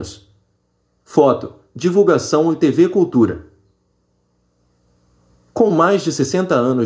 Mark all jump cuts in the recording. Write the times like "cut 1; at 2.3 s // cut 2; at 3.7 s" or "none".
none